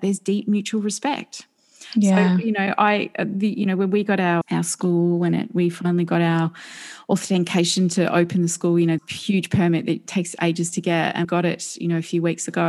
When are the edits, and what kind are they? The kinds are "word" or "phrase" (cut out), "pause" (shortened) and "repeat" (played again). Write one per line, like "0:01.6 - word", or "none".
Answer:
0:04.4 - word
0:09.0 - word
0:11.2 - word

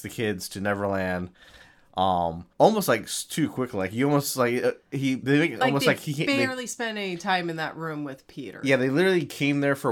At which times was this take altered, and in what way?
0:02.5 - pause

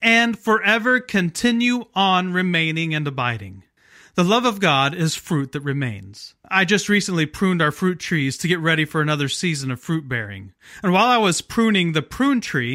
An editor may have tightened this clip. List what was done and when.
0:03.8 - pause
0:06.4 - pause

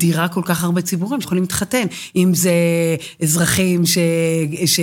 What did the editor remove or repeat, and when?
0:01.2 - word

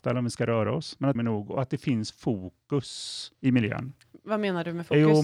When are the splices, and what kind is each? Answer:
0:01.2 - phrase

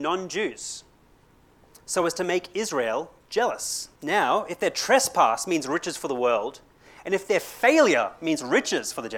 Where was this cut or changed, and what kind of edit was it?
0:04.0 - pause

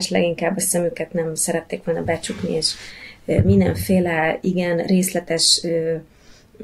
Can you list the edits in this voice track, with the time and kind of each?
none

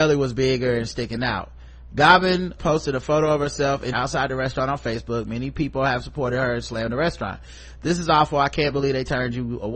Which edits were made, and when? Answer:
0:02.6 - word
0:03.9 - phrase

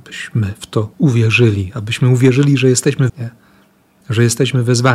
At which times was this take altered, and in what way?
0:00.9 - pause
0:03.1 - word

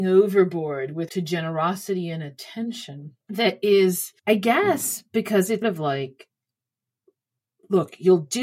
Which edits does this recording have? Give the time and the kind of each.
0:01.1 - word
0:03.2 - pause
0:04.2 - pause
0:05.6 - word

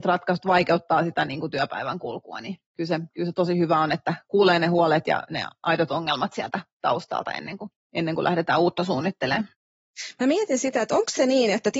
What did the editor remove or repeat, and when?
0:02.6 - pause
0:07.8 - pause

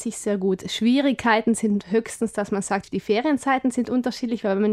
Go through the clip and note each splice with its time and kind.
0:02.8 - word

